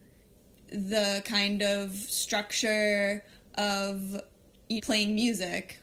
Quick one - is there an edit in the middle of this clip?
yes; 1 cut; at 4.8 s

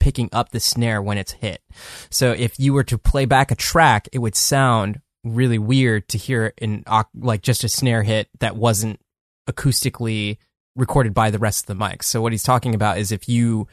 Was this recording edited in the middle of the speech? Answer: no; 0 cuts

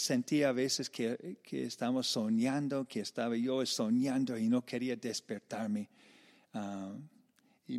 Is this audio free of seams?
yes; 0 cuts

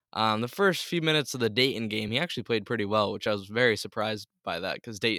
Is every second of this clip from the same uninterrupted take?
yes; 0 cuts

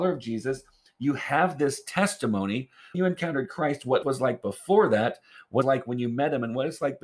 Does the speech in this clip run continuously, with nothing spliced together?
no; 3 cuts; at 2.9 s, 4.0 s, 5.6 s

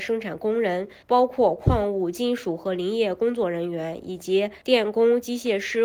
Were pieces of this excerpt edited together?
yes; 2 cuts; at 1.0 s, 4.6 s

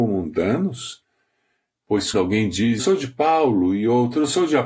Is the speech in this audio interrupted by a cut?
yes; 2 cuts; at 2.1 s, 2.8 s

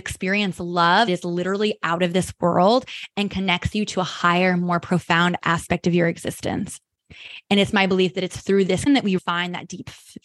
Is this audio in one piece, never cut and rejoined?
no; 3 cuts; at 1.1 s, 8.9 s, 9.2 s

